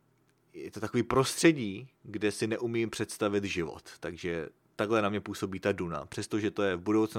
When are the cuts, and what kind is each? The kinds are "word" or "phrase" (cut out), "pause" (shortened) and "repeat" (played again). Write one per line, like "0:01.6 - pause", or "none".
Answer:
none